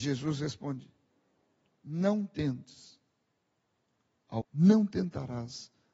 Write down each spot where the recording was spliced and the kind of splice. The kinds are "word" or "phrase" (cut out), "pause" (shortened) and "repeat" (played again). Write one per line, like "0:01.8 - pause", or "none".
0:04.4 - word